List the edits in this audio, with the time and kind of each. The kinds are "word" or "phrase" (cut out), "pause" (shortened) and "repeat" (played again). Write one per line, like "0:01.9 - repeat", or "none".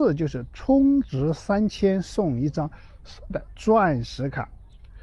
0:03.3 - word